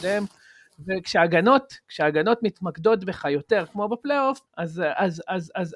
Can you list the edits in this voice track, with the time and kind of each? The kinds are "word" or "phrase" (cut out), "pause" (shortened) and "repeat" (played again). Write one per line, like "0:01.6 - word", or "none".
0:04.5 - pause